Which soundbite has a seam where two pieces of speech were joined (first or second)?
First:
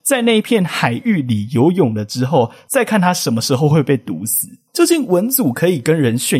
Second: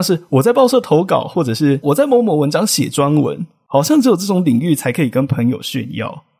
first